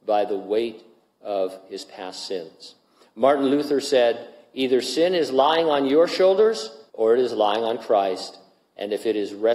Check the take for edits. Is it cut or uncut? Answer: cut